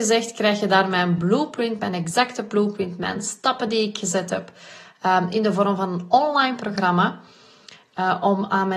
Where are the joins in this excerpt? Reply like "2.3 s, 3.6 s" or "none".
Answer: none